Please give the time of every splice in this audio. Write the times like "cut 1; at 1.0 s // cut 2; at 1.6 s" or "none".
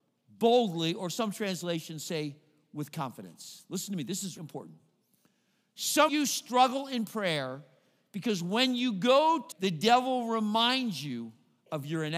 cut 1; at 4.4 s // cut 2; at 6.1 s // cut 3; at 9.5 s